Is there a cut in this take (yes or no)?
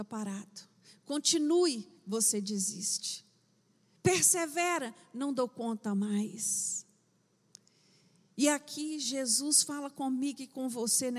no